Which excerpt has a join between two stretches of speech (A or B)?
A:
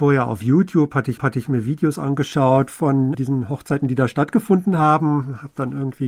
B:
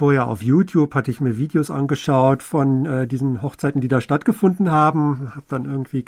A